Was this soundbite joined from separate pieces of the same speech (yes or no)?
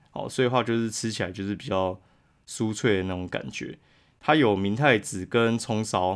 no